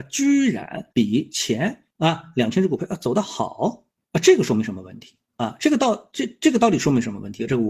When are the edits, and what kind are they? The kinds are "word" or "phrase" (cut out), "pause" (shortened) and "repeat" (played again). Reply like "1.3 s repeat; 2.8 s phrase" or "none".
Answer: 0.9 s pause; 1.9 s pause; 3.9 s pause